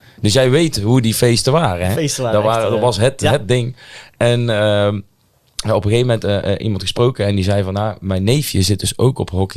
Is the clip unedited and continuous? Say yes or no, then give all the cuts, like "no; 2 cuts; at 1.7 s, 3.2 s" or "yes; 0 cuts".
yes; 0 cuts